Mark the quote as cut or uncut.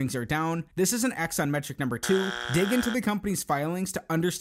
uncut